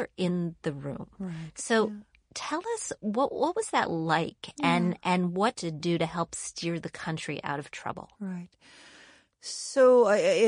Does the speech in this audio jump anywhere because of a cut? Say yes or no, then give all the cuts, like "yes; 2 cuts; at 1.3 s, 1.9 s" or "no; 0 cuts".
yes; 1 cut; at 5.5 s